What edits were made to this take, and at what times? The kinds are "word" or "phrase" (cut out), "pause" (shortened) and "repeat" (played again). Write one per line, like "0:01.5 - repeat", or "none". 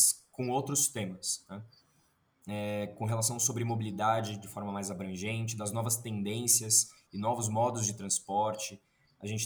none